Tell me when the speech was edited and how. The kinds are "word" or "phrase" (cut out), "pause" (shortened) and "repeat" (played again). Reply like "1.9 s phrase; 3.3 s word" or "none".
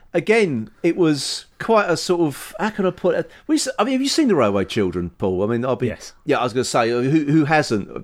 1.5 s pause